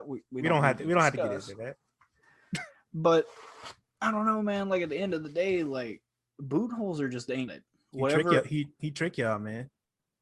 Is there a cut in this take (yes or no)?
yes